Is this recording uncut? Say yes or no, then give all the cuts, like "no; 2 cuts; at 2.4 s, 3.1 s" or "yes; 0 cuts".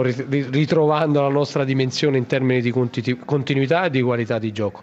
yes; 0 cuts